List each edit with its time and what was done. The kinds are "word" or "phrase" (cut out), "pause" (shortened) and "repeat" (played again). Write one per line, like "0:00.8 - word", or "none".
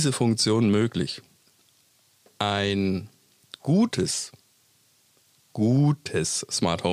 none

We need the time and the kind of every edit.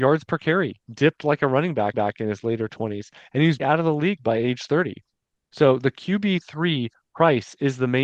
0:01.9 - repeat
0:03.6 - word

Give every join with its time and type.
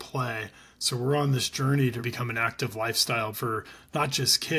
0:02.0 - word
0:03.3 - word

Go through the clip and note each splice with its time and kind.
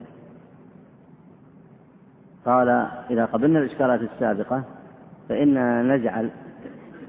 none

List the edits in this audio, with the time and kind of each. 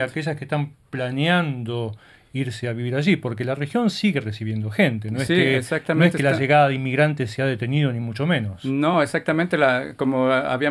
none

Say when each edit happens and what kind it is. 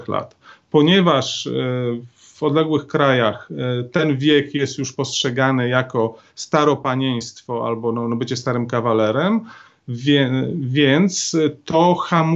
none

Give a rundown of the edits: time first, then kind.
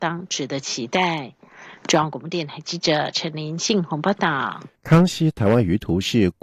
0:04.8 - pause

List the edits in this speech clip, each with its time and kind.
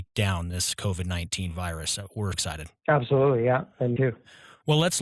0:02.3 - word
0:04.0 - word

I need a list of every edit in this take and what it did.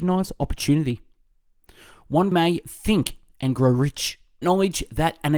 0:02.3 - word
0:04.4 - word

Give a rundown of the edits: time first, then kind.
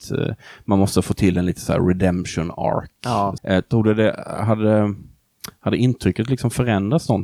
0:03.4 - word

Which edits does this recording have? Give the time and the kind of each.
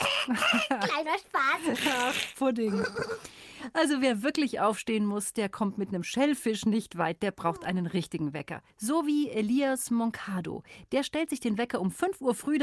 0:08.7 - pause

